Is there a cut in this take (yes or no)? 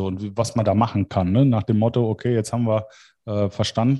no